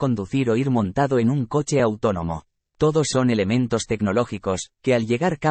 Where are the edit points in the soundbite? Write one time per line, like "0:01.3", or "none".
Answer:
0:03.1